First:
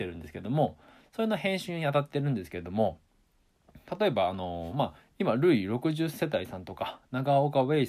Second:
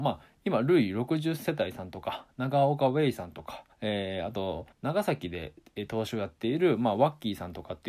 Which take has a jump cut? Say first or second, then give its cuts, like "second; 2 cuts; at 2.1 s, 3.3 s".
second; 2 cuts; at 3.7 s, 4.7 s